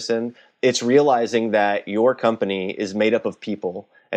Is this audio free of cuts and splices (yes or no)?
yes